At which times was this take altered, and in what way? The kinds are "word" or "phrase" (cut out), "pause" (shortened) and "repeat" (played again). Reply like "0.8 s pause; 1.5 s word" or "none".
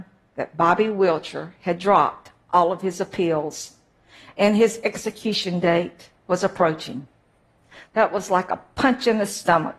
6.2 s pause